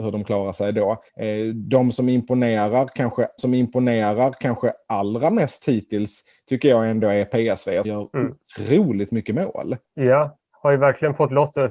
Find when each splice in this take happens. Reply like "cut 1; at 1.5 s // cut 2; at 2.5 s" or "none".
cut 1; at 1.1 s // cut 2; at 3.4 s // cut 3; at 7.8 s // cut 4; at 9.8 s